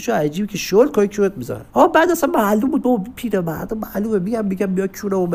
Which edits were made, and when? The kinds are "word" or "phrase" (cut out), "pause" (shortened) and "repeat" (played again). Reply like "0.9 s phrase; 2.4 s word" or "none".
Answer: 1.7 s pause